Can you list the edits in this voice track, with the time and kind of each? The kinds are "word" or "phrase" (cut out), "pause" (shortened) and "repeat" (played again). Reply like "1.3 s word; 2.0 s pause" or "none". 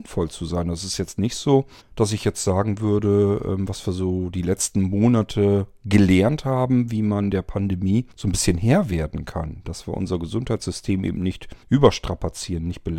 1.8 s pause; 8.1 s pause; 11.6 s pause